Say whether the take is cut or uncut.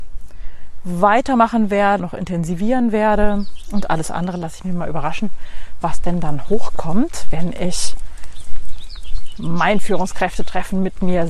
cut